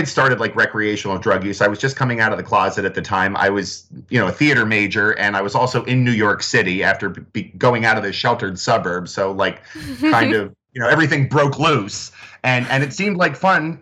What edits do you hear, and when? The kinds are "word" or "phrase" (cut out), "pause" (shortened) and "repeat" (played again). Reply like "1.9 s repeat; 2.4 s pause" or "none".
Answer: 7.3 s pause